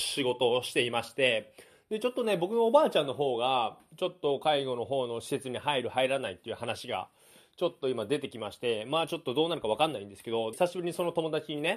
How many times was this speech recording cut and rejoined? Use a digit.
1